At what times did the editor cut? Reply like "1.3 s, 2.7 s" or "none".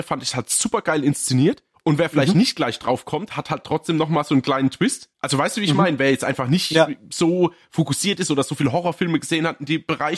1.7 s, 5.1 s

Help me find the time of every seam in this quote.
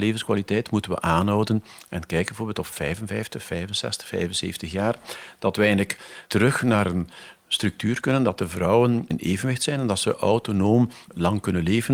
6.2 s, 11.0 s

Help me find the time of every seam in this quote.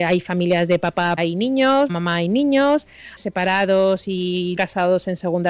1.2 s, 1.9 s, 3.2 s, 4.6 s

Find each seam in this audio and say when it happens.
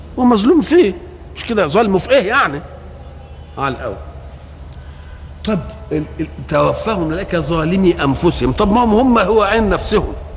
none

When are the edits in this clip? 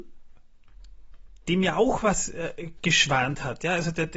none

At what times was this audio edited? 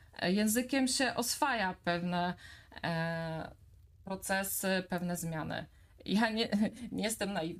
none

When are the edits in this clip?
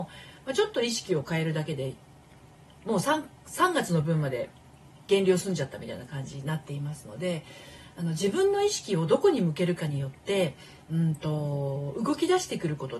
none

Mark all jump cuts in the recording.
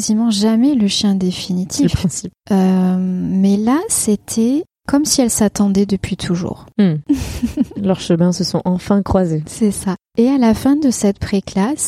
2.4 s

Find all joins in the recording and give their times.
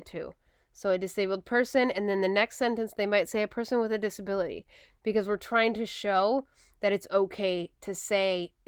none

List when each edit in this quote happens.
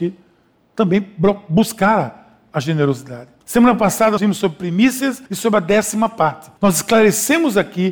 3.4 s, 4.2 s, 5.3 s, 6.6 s

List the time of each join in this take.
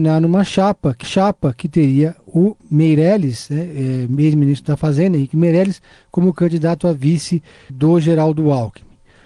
1.0 s, 2.6 s, 7.7 s

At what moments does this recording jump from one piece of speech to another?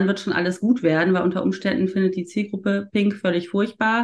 none

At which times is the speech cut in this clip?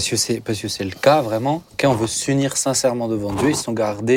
1.7 s

